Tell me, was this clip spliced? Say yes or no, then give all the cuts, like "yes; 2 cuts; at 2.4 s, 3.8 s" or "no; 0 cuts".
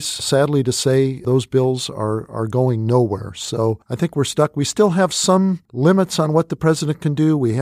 yes; 2 cuts; at 3.8 s, 5.6 s